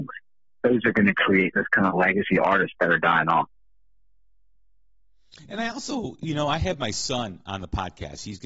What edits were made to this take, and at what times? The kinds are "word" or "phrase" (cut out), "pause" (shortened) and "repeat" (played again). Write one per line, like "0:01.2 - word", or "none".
none